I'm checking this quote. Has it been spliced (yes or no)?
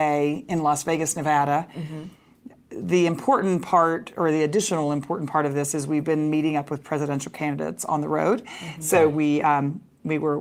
no